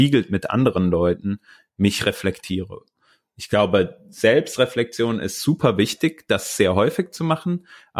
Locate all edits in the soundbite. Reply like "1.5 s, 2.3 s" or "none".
none